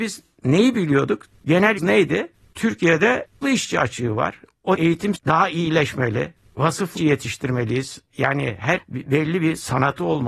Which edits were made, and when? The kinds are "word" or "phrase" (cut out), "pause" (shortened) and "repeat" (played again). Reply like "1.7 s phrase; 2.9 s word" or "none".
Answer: 1.8 s word; 3.4 s word; 4.8 s word; 5.2 s word; 7.0 s word; 8.8 s word

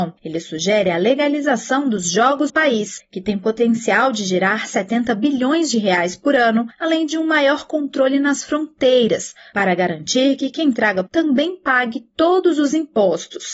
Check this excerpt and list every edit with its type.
2.5 s word; 11.1 s phrase

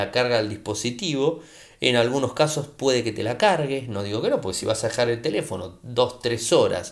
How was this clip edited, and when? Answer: none

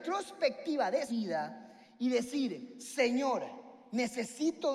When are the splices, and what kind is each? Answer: 1.1 s word

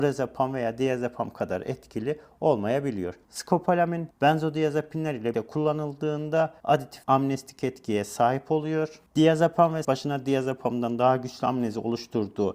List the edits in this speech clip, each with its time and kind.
4.1 s pause; 5.3 s word; 9.8 s phrase

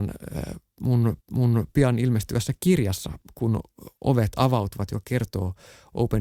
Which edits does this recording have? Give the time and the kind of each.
1.2 s repeat

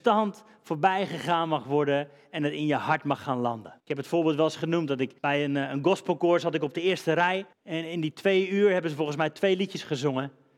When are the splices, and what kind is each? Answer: 3.8 s pause; 5.2 s pause; 7.5 s pause

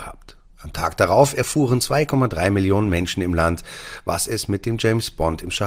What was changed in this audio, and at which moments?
none

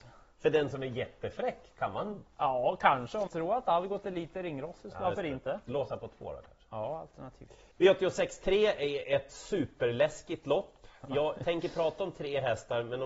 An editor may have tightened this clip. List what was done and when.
2.3 s pause; 3.3 s word; 7.7 s pause

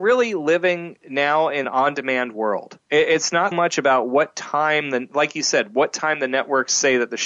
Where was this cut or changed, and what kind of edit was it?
1.6 s word; 2.8 s pause; 3.5 s word

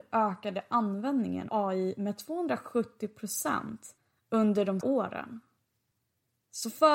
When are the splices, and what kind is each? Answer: 1.5 s word; 4.0 s pause; 4.8 s phrase

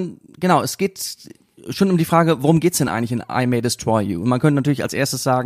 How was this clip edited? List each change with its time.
none

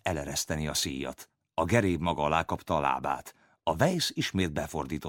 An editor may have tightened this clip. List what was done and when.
none

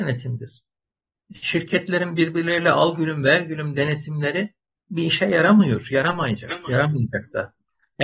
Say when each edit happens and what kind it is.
none

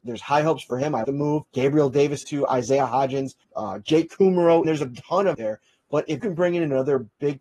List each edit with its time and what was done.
1.0 s word; 1.5 s pause; 2.2 s phrase; 3.4 s pause; 4.6 s word; 5.3 s phrase; 6.2 s word

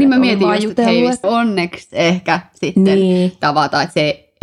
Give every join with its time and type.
1.2 s phrase

